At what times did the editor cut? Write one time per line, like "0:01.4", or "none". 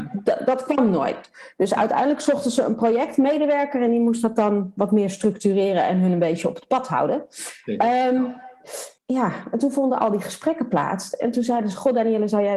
0:09.0